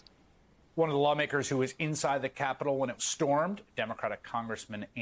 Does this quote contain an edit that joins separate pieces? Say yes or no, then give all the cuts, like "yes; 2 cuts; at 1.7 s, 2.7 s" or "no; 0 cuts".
yes; 1 cut; at 3.0 s